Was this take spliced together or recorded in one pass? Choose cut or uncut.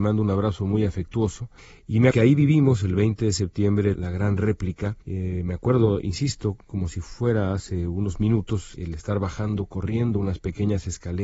cut